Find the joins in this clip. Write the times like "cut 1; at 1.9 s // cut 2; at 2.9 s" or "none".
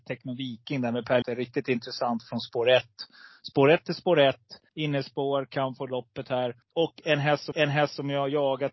cut 1; at 1.2 s // cut 2; at 4.7 s // cut 3; at 6.6 s // cut 4; at 7.5 s